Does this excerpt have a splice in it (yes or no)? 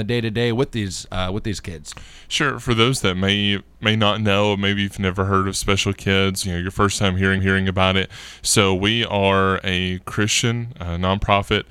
yes